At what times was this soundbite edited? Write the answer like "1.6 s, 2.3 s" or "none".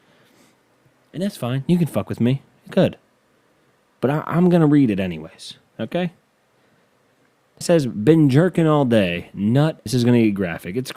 2.7 s, 7.6 s, 9.9 s